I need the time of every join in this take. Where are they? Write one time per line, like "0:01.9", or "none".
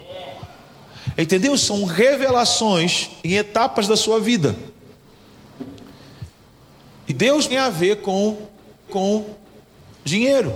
0:03.2
0:07.1
0:07.5
0:08.9

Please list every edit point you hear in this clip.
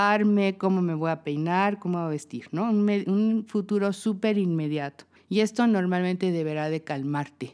0:05.2

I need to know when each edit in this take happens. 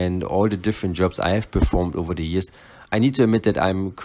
0:02.9

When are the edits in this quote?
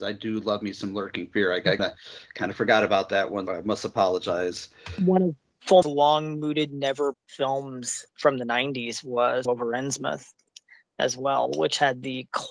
0:01.8
0:03.5
0:05.8
0:07.1
0:08.1
0:09.4

